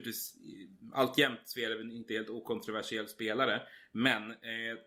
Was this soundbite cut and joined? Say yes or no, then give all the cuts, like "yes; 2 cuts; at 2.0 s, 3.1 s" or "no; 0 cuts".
no; 0 cuts